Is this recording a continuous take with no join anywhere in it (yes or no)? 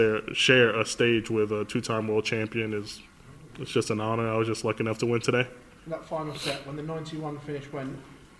yes